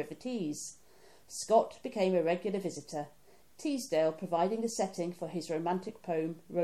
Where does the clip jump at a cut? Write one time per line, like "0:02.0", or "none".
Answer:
none